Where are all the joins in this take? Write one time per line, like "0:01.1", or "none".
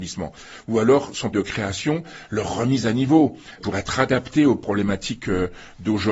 0:01.3
0:03.6